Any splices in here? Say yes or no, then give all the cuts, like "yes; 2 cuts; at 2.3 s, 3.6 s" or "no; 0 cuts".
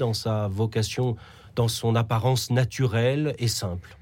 no; 0 cuts